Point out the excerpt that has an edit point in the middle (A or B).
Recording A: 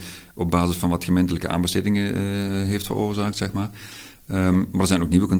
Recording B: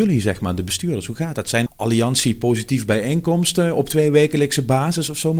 B